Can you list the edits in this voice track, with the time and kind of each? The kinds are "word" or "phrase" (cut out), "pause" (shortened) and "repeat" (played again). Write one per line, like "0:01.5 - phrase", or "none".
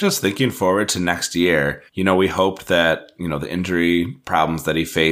0:01.9 - pause